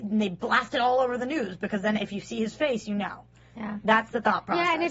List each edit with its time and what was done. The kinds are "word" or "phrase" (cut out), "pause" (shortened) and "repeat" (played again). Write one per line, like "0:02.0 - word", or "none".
none